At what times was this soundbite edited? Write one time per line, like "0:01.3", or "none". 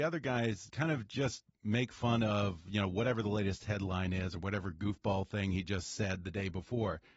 none